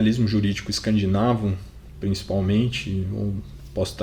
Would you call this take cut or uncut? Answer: uncut